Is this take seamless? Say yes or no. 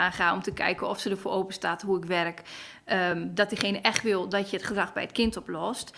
yes